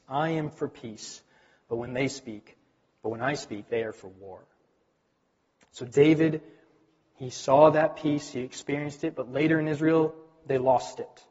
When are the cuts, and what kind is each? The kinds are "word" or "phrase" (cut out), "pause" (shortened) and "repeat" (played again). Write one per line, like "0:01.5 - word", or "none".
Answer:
none